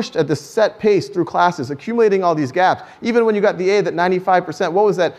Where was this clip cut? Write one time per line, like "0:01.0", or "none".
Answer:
none

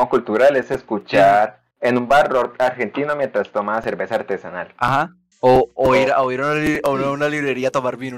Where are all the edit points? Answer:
0:01.7
0:05.3

